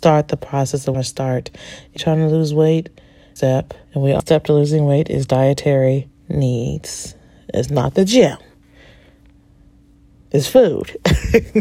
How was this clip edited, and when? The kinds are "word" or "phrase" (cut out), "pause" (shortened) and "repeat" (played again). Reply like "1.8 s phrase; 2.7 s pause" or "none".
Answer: 0.9 s phrase; 2.0 s word; 3.4 s phrase; 3.8 s pause; 4.2 s phrase; 6.1 s pause